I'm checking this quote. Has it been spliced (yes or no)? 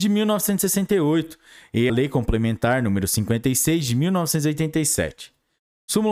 yes